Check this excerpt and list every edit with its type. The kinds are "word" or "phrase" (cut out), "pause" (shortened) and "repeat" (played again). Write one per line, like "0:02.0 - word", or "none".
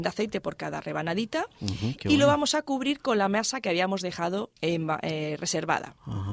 0:04.6 - pause